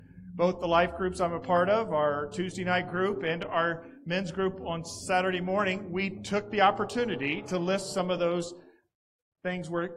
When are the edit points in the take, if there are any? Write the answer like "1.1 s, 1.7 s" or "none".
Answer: none